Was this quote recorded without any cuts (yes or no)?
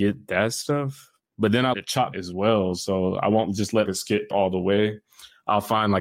no